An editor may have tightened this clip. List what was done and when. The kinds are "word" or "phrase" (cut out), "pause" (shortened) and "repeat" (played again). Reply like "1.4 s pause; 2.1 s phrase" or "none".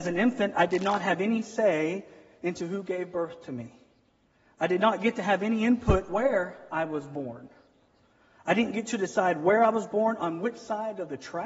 none